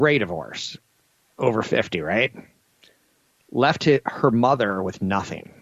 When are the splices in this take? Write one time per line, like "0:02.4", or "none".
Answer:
none